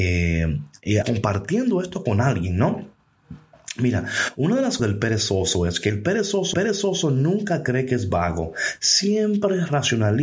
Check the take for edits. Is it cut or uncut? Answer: cut